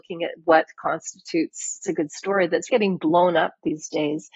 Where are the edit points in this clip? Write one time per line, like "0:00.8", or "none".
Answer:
0:01.8
0:02.7